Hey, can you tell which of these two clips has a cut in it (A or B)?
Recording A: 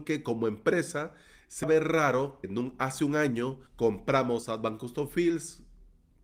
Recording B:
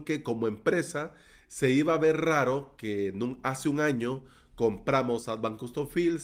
A